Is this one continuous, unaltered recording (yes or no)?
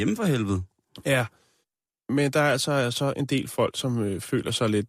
yes